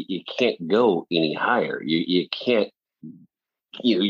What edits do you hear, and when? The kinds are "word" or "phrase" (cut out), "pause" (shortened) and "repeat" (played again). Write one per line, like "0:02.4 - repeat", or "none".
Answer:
none